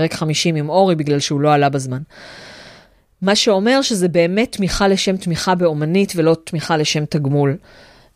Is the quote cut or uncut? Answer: uncut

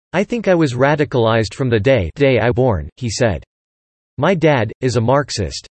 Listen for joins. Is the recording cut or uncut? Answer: cut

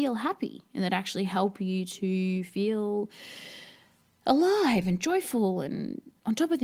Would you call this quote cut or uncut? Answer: uncut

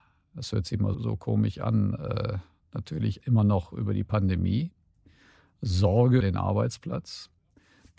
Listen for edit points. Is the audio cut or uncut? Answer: cut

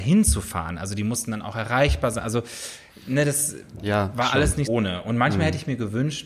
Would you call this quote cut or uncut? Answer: cut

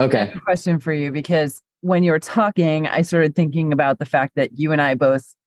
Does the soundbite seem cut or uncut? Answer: cut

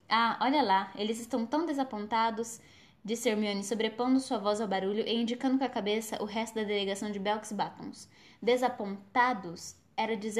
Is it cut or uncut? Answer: uncut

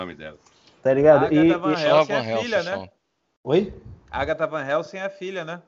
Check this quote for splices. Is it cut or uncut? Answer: uncut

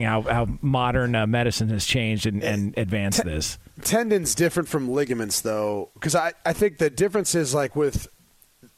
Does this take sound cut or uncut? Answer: uncut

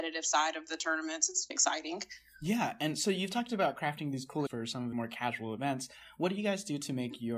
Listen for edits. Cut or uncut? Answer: cut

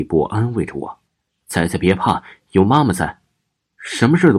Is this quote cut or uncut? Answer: cut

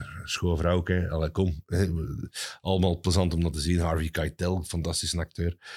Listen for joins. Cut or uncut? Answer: uncut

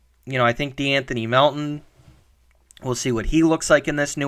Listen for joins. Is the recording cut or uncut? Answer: uncut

